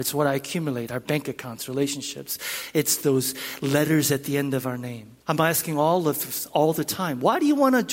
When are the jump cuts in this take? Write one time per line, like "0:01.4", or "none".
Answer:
0:05.2

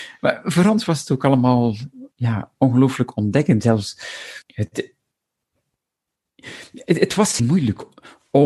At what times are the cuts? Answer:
0:02.1
0:04.4
0:07.4

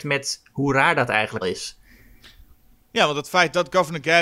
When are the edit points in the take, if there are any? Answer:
0:01.4

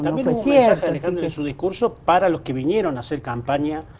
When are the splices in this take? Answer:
none

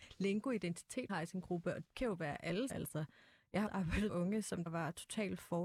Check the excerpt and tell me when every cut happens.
0:01.1
0:01.8
0:02.7
0:03.7
0:04.1
0:04.7

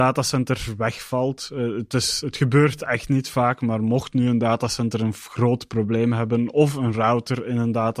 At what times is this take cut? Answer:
none

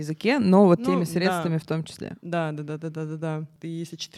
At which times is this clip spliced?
none

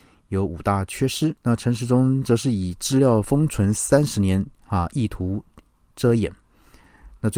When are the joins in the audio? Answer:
0:01.4

